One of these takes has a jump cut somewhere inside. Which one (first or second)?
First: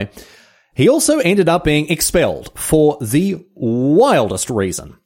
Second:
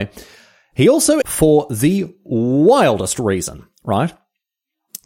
second